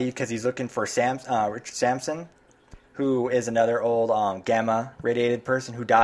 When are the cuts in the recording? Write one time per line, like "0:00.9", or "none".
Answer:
none